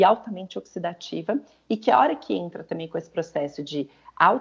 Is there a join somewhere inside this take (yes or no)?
no